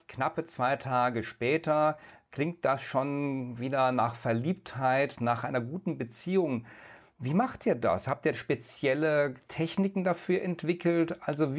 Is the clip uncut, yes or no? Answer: yes